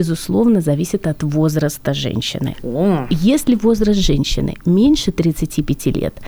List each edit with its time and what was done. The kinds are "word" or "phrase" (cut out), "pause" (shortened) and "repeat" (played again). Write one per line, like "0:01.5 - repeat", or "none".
none